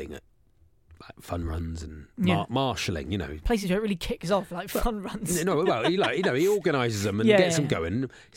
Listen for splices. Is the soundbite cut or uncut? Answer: uncut